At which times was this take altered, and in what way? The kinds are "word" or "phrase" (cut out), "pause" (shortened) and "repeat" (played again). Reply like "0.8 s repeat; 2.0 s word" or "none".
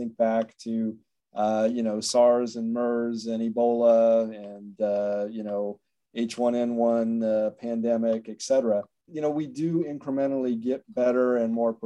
9.1 s word